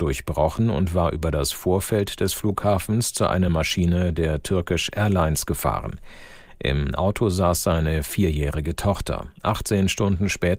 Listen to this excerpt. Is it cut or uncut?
uncut